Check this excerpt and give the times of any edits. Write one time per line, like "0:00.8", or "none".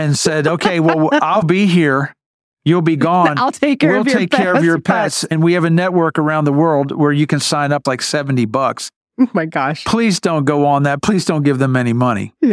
0:01.4
0:07.9